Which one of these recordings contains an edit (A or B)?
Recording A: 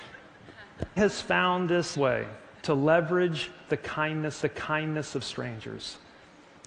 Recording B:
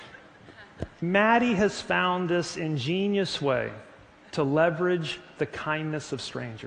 A